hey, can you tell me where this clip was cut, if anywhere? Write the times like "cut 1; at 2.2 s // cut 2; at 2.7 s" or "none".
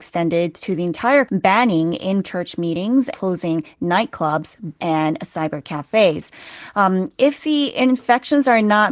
cut 1; at 1.3 s // cut 2; at 2.2 s // cut 3; at 3.1 s // cut 4; at 4.8 s